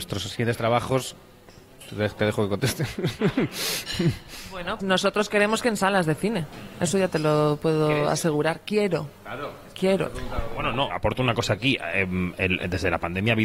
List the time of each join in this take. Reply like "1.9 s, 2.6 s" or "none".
4.8 s, 10.9 s